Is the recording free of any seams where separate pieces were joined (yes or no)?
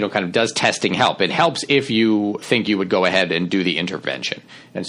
no